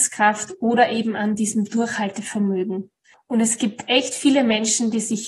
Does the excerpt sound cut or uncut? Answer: uncut